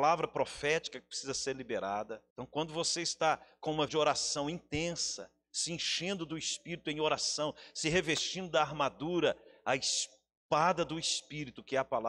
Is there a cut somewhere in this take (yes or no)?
yes